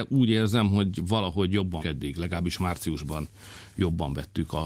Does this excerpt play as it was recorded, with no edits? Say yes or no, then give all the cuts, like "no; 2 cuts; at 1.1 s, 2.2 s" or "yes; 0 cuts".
no; 1 cut; at 1.8 s